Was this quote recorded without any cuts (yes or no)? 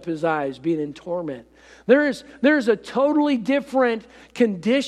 yes